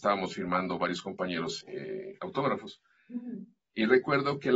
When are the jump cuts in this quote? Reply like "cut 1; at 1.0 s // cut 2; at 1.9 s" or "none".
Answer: cut 1; at 1.6 s